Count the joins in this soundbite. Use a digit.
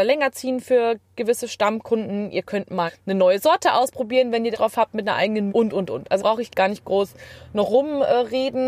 5